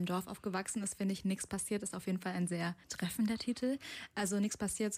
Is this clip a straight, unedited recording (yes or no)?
no